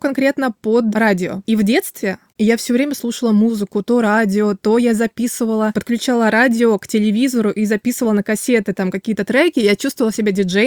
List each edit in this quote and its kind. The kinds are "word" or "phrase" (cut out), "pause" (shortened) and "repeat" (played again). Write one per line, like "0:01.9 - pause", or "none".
none